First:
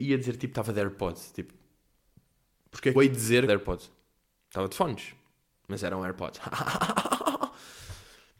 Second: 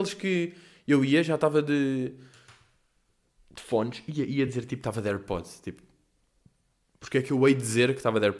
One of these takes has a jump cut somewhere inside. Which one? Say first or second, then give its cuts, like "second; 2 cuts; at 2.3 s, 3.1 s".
first; 2 cuts; at 2.9 s, 3.5 s